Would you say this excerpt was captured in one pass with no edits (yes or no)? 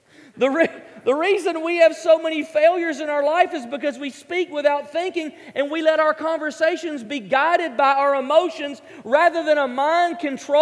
yes